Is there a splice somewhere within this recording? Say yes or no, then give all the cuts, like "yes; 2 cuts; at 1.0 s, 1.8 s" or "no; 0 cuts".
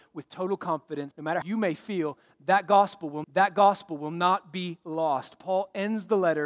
yes; 3 cuts; at 1.1 s, 1.4 s, 3.2 s